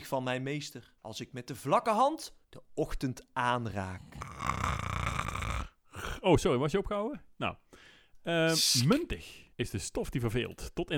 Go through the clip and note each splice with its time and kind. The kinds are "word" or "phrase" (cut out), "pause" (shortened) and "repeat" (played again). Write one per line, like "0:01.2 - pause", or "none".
0:01.0 - pause
0:02.4 - pause
0:09.5 - pause